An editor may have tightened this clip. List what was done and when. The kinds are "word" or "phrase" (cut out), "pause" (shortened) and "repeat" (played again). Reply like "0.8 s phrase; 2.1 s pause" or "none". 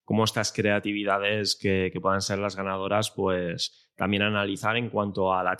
none